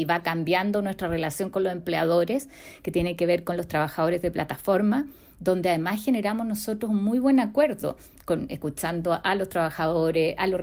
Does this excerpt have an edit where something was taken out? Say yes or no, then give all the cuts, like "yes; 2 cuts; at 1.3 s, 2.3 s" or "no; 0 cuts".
no; 0 cuts